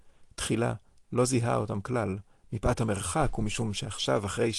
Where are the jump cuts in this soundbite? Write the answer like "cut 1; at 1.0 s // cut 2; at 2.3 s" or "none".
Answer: none